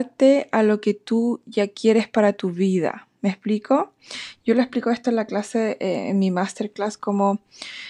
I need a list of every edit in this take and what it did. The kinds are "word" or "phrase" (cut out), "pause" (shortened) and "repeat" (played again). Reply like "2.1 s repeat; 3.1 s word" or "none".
none